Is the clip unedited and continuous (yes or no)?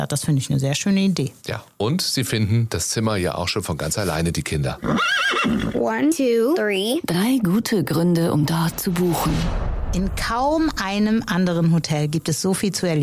no